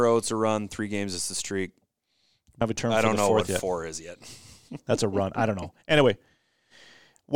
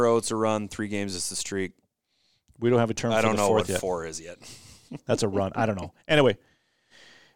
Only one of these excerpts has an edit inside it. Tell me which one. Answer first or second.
first